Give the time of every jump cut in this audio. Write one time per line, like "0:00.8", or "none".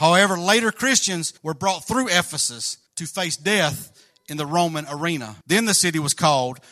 0:01.4
0:02.9
0:05.4